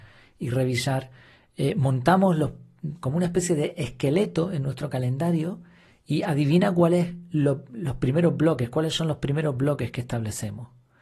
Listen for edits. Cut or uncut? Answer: uncut